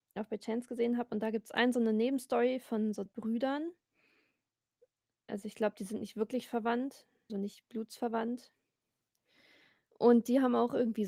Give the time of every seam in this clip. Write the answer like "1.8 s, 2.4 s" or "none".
3.1 s, 7.3 s